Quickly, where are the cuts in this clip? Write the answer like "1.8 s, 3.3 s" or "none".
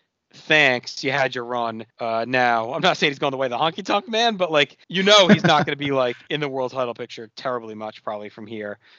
1.9 s, 4.8 s